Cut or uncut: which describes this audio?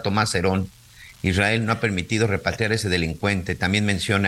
uncut